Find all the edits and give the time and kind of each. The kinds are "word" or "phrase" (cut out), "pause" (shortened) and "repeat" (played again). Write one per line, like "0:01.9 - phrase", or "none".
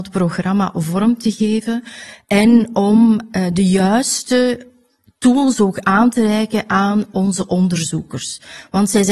none